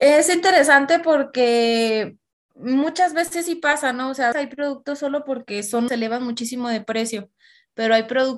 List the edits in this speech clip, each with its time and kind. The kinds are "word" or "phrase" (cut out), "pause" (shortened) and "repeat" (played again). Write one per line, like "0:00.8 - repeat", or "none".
0:04.3 - word
0:05.9 - word